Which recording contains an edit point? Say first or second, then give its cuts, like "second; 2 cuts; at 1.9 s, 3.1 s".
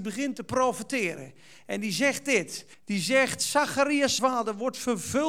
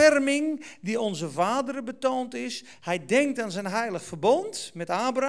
first; 2 cuts; at 2.7 s, 4.2 s